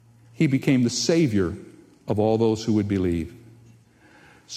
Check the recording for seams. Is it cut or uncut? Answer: uncut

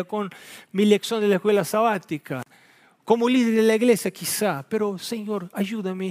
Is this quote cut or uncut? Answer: uncut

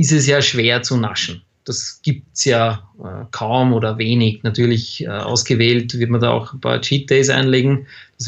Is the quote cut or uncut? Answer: uncut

